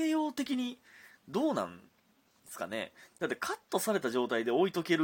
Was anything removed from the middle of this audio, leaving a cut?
yes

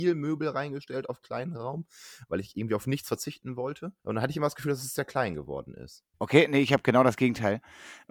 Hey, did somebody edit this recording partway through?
yes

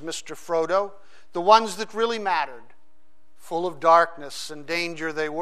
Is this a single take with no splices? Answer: yes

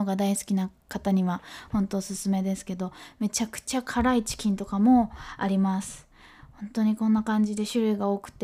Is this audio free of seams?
yes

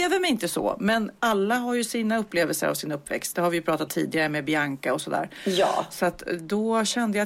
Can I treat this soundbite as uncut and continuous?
no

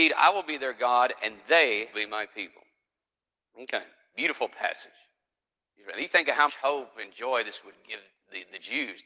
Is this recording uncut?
no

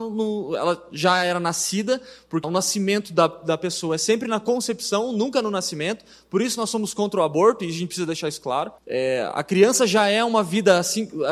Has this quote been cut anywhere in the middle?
yes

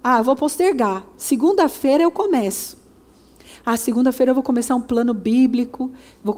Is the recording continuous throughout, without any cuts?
yes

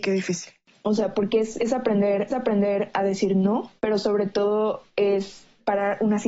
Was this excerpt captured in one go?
no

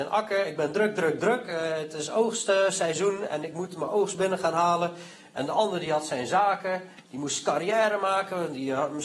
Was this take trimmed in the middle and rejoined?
no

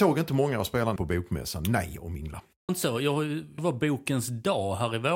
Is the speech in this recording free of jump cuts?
no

